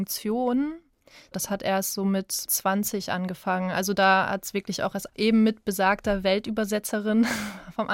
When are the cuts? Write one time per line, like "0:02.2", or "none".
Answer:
0:02.5
0:05.1